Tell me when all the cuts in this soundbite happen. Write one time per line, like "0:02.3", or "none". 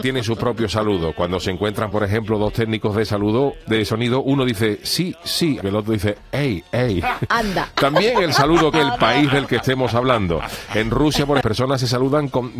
0:01.9
0:05.6
0:08.7
0:11.4